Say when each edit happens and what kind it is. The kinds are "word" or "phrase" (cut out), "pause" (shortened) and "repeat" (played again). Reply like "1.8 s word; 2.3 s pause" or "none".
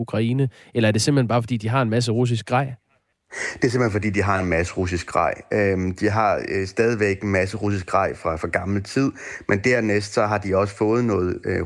3.1 s pause